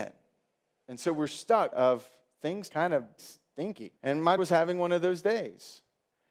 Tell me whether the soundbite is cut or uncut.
cut